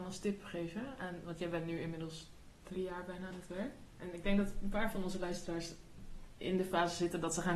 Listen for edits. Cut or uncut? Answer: uncut